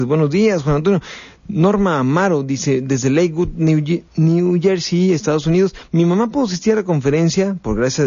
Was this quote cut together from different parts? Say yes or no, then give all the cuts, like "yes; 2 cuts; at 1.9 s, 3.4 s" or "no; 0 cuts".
yes; 1 cut; at 4.1 s